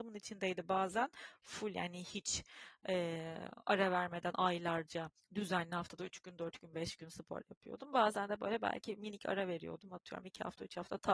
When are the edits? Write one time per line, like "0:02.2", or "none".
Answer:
0:05.2